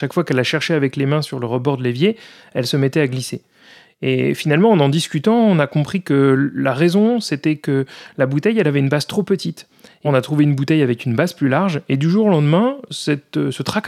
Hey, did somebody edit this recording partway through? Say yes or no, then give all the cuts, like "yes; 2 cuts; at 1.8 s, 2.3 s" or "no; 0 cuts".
yes; 1 cut; at 10.0 s